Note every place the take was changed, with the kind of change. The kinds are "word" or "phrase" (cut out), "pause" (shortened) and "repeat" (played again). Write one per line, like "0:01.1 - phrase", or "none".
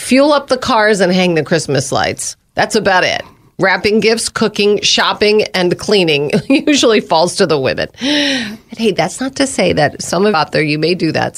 0:10.3 - word